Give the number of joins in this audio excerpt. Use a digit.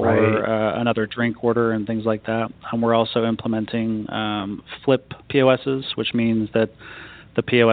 1